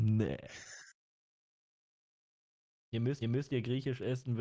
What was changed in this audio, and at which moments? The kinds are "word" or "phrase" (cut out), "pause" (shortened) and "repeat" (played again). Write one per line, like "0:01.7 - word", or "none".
0:03.2 - repeat